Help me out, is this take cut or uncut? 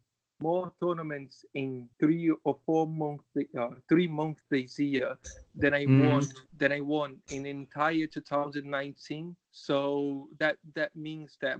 cut